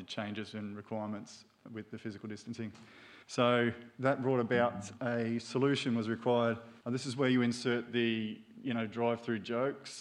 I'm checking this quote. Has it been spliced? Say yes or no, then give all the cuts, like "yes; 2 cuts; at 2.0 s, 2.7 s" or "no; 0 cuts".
yes; 2 cuts; at 3.2 s, 6.8 s